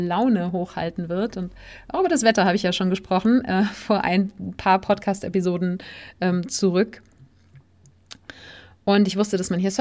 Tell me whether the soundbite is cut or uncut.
uncut